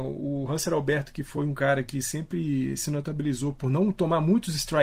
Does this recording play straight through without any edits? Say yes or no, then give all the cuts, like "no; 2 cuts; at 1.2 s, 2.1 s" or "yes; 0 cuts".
yes; 0 cuts